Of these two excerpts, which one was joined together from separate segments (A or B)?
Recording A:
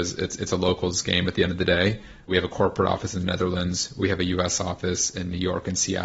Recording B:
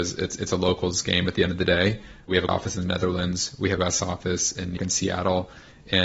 B